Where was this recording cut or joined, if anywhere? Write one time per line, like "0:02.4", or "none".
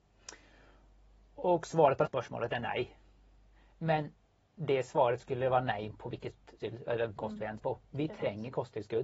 0:02.0
0:06.6
0:07.2
0:07.6